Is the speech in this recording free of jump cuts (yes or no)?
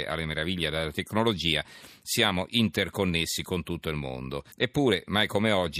no